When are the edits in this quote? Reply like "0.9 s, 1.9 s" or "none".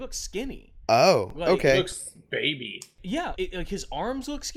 3.4 s